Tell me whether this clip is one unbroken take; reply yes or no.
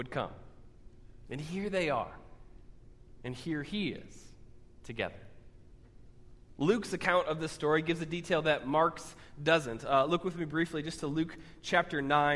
yes